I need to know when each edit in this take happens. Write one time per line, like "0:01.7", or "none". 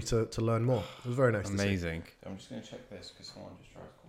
0:02.2